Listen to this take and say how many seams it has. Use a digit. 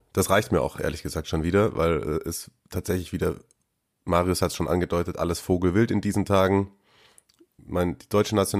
0